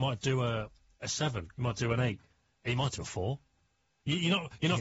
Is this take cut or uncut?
uncut